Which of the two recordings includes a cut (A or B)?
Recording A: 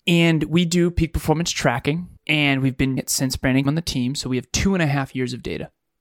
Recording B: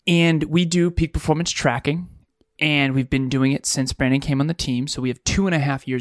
A